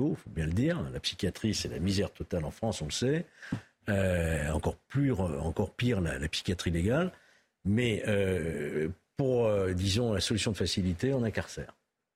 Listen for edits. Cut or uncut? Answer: uncut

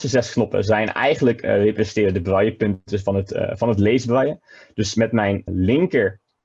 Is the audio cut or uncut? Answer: cut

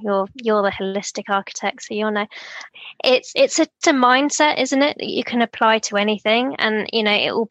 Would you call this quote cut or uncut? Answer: cut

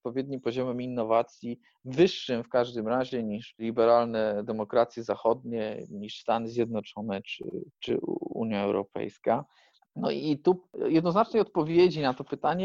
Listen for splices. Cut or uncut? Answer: uncut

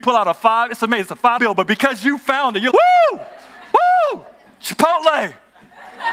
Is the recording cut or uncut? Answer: cut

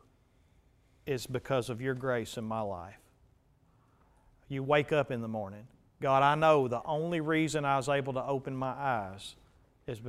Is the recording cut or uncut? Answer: uncut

